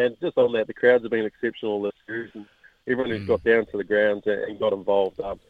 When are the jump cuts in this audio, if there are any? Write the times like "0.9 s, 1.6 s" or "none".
none

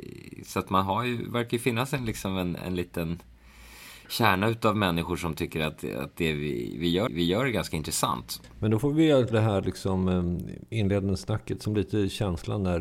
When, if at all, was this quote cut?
7.1 s, 9.3 s

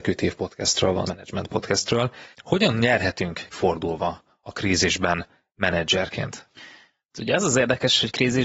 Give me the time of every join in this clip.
1.0 s, 2.3 s, 3.5 s

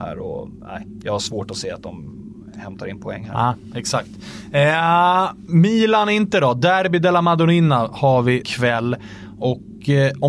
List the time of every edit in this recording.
8.4 s

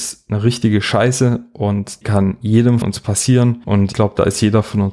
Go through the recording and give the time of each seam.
2.0 s, 2.8 s, 3.9 s

